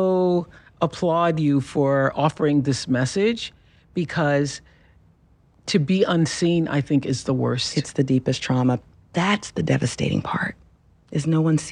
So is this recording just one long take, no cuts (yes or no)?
yes